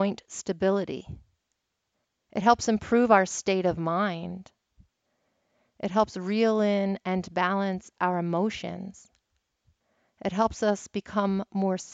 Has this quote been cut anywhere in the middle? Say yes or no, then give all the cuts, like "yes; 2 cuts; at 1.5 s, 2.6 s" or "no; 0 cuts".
no; 0 cuts